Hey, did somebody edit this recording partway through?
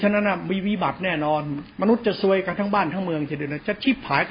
yes; 1 cut; at 1.7 s

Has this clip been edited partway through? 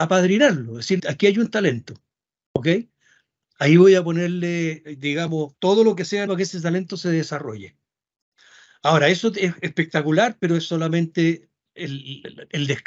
yes; 3 cuts; at 1.0 s, 5.5 s, 6.3 s

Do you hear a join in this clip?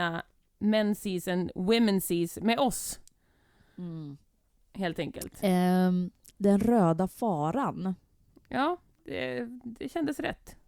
no; 0 cuts

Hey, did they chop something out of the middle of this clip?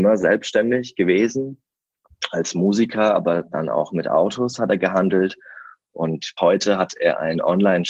yes; 1 cut; at 6.4 s

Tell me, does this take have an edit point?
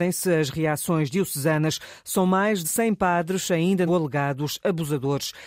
yes; 2 cuts; at 2.6 s, 3.9 s

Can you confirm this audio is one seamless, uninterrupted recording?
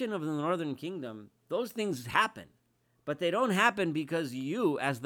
yes; 0 cuts

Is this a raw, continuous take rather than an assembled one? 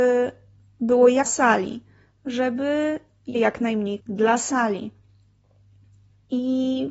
no; 3 cuts; at 1.2 s, 3.3 s, 4.0 s

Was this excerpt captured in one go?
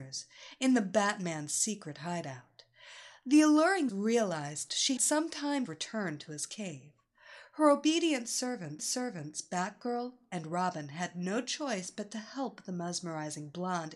no; 4 cuts; at 3.9 s, 5.0 s, 5.7 s, 8.8 s

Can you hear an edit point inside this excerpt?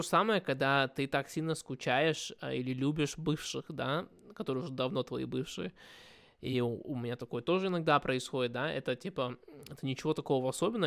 no; 0 cuts

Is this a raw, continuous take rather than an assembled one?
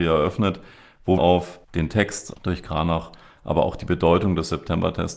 no; 3 cuts; at 1.2 s, 1.6 s, 2.3 s

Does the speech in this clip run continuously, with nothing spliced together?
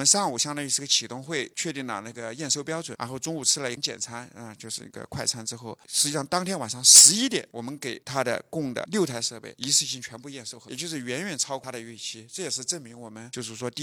yes; 0 cuts

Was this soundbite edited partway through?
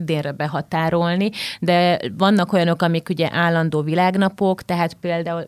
no; 0 cuts

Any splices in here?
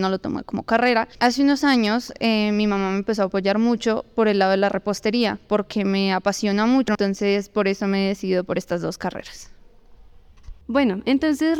yes; 1 cut; at 1.1 s

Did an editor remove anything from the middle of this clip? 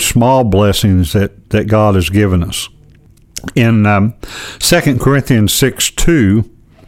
no; 0 cuts

